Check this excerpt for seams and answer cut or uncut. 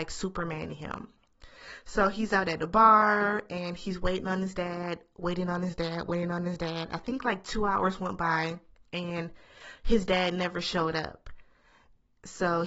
uncut